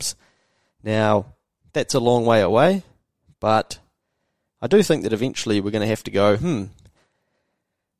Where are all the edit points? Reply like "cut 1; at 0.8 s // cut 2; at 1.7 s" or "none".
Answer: none